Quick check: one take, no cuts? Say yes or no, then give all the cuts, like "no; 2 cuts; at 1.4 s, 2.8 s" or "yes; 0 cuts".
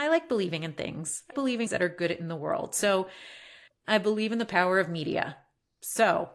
no; 3 cuts; at 1.3 s, 1.7 s, 3.7 s